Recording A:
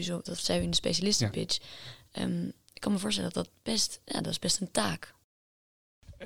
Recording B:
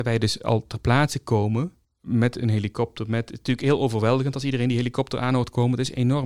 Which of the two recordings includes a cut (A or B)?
B